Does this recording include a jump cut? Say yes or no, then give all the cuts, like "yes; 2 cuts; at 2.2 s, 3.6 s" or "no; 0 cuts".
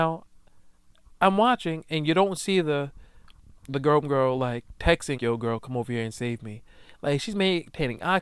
yes; 1 cut; at 5.2 s